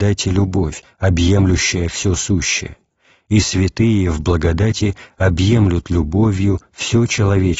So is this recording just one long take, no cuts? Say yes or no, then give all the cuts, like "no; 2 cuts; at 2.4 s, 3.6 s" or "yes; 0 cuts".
yes; 0 cuts